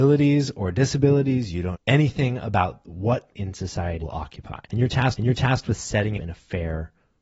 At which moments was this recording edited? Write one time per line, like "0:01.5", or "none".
0:01.7
0:03.3
0:04.0
0:04.6
0:05.2
0:06.2